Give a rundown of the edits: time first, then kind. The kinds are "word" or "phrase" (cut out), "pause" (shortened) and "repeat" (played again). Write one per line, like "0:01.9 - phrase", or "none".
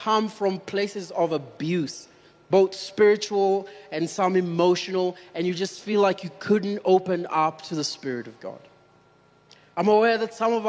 none